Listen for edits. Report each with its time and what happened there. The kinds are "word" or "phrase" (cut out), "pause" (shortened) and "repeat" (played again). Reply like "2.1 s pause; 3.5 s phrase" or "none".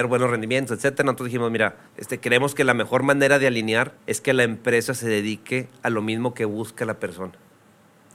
1.9 s pause; 4.0 s pause